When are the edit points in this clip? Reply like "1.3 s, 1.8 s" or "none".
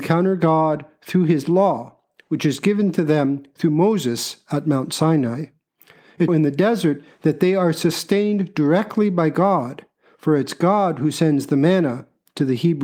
6.3 s